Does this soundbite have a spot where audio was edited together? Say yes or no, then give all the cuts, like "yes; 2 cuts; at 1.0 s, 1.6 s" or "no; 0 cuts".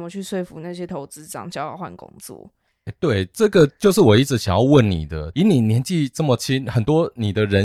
no; 0 cuts